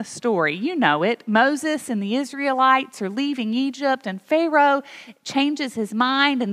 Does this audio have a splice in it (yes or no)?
no